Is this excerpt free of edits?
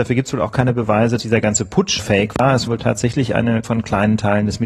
no; 4 cuts; at 1.2 s, 2.0 s, 2.7 s, 3.6 s

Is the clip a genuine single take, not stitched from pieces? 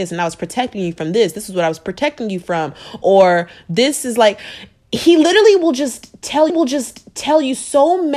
no; 1 cut; at 6.5 s

